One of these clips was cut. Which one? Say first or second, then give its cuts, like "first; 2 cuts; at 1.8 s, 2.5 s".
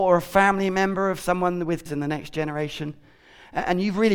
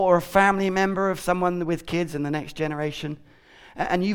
first; 1 cut; at 1.9 s